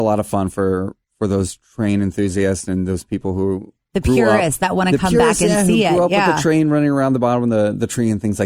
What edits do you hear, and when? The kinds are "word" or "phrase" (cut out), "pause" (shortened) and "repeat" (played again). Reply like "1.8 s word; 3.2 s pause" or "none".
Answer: 1.0 s pause